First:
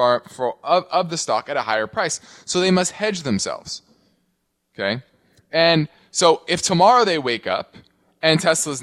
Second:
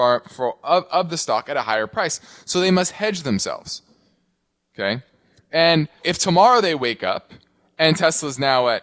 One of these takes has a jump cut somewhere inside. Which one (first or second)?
second